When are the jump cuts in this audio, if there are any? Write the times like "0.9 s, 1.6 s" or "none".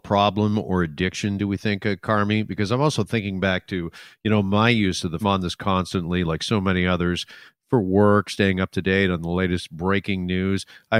5.2 s